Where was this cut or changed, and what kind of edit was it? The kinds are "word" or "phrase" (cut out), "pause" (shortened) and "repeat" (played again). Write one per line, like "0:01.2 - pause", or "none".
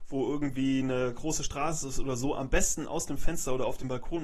none